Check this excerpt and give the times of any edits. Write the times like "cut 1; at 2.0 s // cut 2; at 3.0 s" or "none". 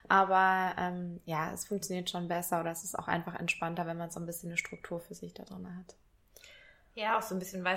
none